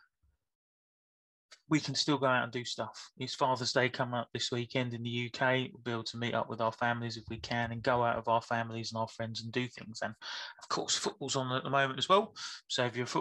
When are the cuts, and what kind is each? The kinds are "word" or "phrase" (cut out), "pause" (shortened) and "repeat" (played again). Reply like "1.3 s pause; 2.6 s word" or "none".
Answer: 5.7 s word